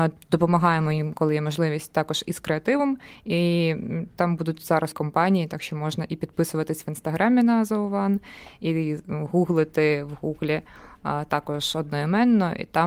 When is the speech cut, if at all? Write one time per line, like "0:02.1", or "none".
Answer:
0:04.9